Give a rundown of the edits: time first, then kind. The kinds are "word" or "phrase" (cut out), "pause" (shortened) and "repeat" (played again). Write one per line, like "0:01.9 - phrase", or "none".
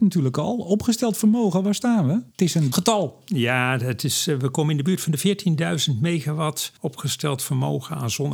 0:02.3 - pause
0:02.7 - word
0:06.8 - pause